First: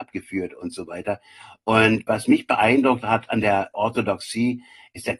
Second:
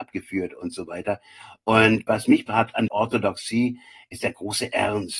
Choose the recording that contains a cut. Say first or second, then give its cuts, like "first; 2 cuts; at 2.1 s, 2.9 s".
second; 2 cuts; at 2.5 s, 2.9 s